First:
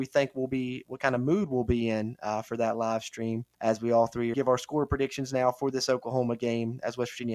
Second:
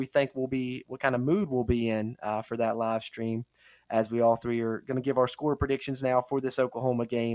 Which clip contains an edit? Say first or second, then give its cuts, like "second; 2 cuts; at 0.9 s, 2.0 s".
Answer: first; 2 cuts; at 3.5 s, 4.3 s